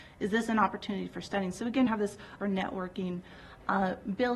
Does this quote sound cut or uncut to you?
cut